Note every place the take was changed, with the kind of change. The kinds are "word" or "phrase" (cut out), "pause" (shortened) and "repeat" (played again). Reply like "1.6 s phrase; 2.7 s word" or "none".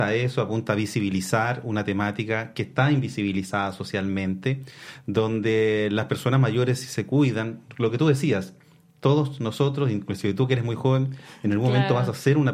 none